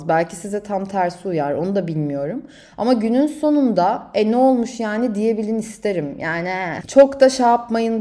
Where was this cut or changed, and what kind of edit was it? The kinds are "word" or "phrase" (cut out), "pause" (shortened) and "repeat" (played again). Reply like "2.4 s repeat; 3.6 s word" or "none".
6.8 s word